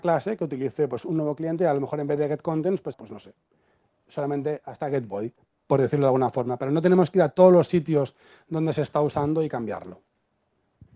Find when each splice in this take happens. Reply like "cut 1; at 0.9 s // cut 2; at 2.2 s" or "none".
cut 1; at 2.9 s